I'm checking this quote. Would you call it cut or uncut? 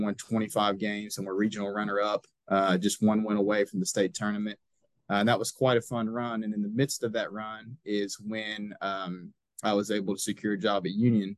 uncut